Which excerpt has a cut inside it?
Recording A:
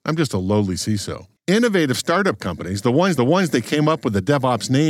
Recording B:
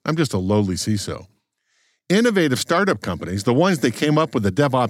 A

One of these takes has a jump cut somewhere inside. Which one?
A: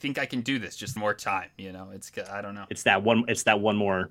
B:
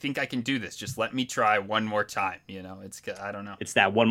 A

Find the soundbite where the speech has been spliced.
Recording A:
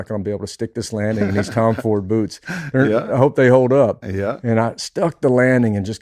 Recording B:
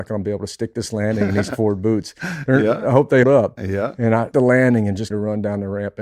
B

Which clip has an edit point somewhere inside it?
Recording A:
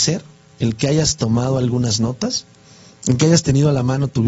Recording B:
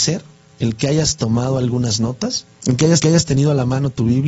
B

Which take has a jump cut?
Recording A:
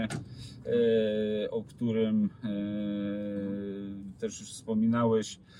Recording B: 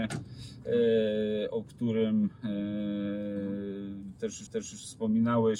B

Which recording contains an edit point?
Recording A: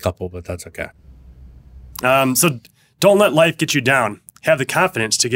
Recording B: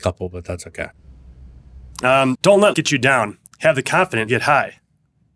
B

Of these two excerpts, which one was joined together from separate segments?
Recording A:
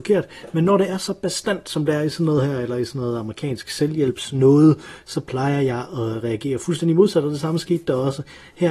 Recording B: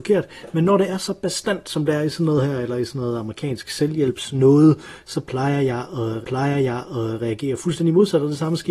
B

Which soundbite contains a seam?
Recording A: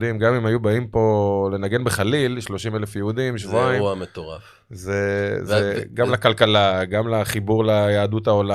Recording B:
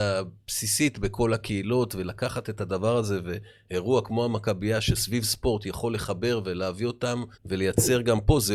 B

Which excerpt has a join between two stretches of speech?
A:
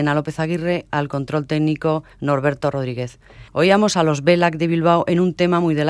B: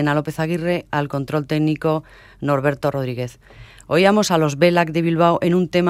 A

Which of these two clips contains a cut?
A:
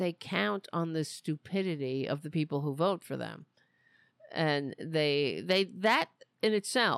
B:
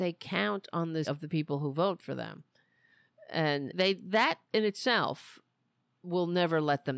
B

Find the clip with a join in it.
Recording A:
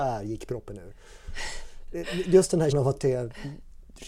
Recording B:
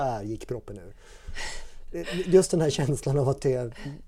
A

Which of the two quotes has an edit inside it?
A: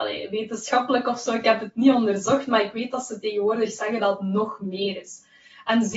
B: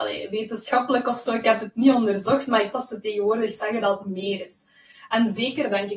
B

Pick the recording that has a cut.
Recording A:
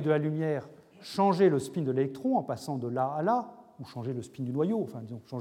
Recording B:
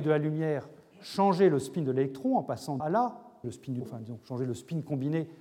B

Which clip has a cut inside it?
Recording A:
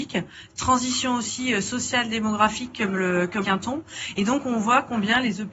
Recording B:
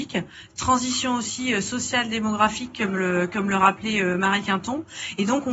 A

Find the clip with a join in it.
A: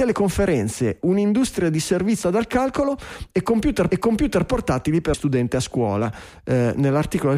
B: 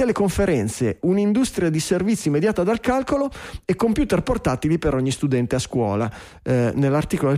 A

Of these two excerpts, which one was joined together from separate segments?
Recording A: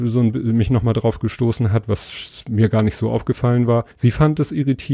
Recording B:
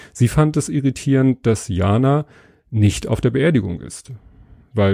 A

